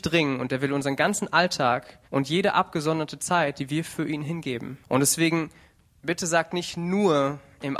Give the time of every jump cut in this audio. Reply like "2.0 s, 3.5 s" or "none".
2.0 s, 4.8 s, 5.8 s